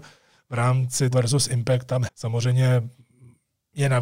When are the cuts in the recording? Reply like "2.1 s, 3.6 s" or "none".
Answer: 1.1 s, 2.1 s

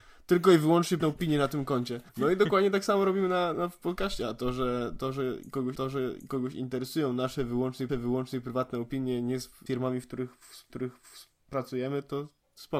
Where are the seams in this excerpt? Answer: 1.0 s, 2.1 s, 3.5 s, 5.7 s, 7.9 s, 9.7 s, 10.7 s

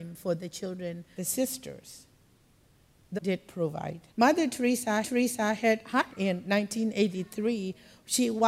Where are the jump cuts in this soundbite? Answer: 1.2 s, 3.2 s, 4.1 s, 5.0 s, 6.1 s

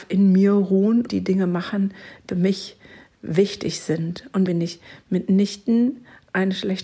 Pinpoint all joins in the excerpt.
1.1 s, 2.3 s, 4.5 s

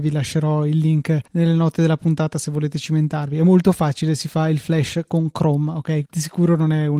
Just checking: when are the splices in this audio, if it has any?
1.3 s, 6.0 s

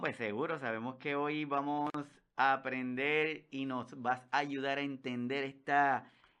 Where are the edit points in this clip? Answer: none

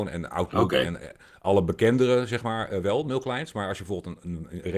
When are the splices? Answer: none

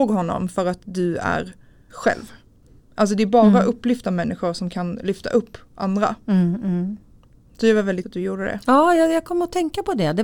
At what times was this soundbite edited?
1.9 s, 8.0 s

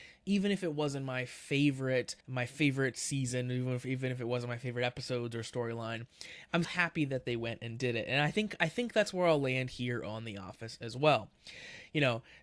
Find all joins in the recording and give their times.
2.2 s, 6.6 s

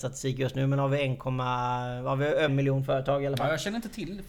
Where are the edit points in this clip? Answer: 2.5 s

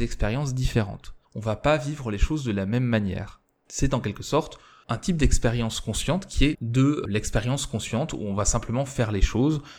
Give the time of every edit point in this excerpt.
1.2 s, 6.5 s

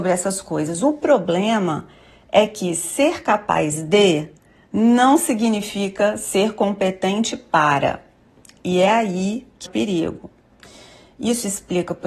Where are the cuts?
9.7 s

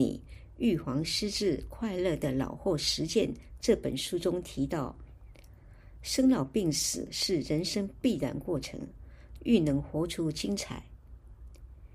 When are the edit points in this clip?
9.4 s

